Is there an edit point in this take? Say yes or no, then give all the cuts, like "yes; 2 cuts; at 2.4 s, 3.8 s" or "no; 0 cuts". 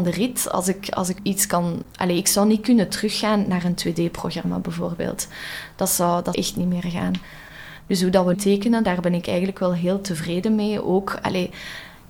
yes; 3 cuts; at 1.2 s, 6.3 s, 8.3 s